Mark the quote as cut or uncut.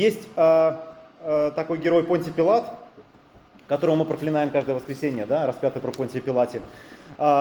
uncut